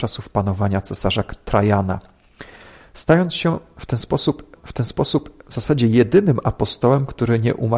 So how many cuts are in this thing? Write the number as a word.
one